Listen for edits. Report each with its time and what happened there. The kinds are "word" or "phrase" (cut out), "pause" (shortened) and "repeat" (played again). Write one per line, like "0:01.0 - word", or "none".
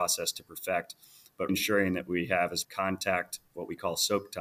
0:01.5 - word
0:02.6 - word